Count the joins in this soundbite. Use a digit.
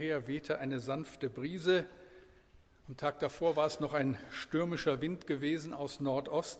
0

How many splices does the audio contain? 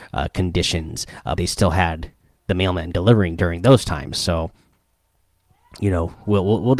2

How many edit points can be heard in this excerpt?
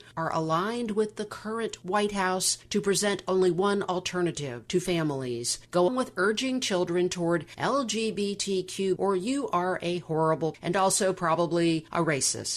3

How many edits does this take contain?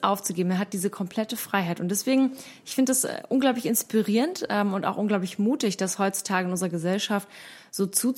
0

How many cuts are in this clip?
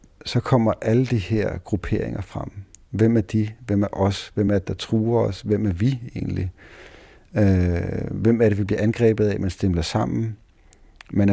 0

